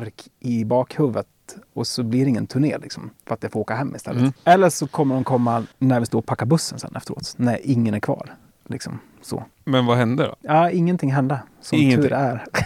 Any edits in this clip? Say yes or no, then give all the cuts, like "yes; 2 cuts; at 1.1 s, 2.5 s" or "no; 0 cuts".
yes; 5 cuts; at 3.2 s, 4.4 s, 5.7 s, 8.5 s, 9.5 s